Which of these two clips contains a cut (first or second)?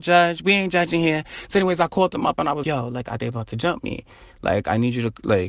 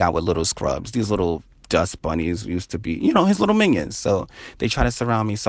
first